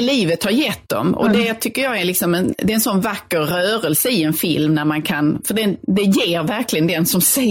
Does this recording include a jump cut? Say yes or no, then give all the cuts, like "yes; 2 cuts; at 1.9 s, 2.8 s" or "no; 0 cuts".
no; 0 cuts